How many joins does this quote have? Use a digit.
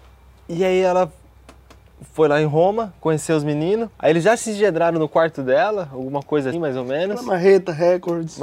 2